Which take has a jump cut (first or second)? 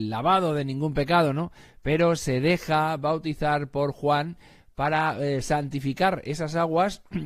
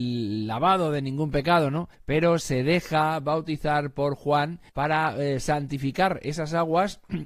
second